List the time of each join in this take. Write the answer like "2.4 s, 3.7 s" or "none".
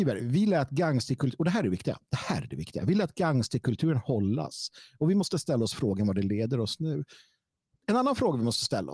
none